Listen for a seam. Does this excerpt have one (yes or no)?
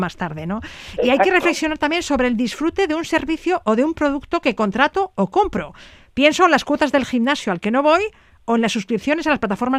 no